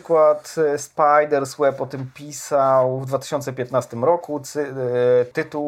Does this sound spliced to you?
no; 0 cuts

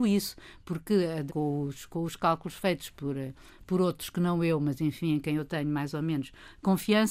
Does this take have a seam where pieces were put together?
yes; 1 cut; at 1.3 s

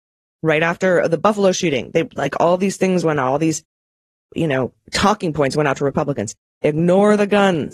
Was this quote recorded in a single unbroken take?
yes; 0 cuts

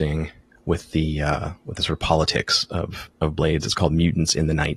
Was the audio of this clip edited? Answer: no; 0 cuts

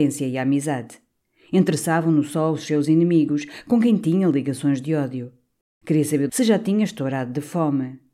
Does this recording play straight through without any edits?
no; 1 cut; at 6.3 s

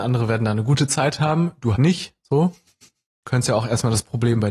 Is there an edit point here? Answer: yes; 1 cut; at 1.7 s

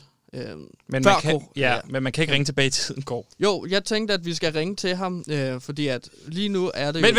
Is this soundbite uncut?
no; 1 cut; at 3.3 s

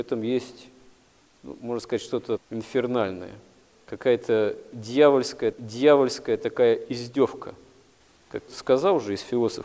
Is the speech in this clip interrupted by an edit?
yes; 3 cuts; at 2.4 s, 5.5 s, 8.5 s

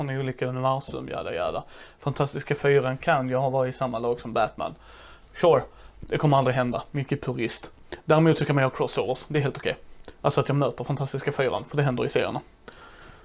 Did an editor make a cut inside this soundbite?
no; 0 cuts

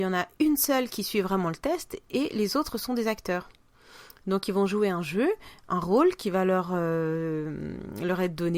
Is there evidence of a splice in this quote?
no; 0 cuts

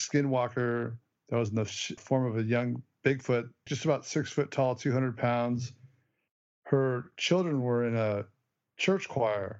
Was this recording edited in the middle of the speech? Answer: yes; 2 cuts; at 2.0 s, 3.7 s

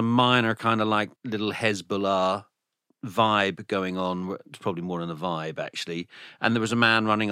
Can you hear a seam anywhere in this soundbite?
yes; 1 cut; at 1.2 s

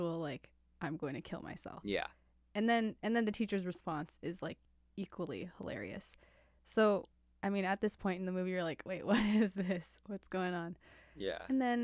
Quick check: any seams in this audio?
no; 0 cuts

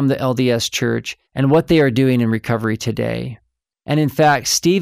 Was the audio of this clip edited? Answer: yes; 1 cut; at 1.3 s

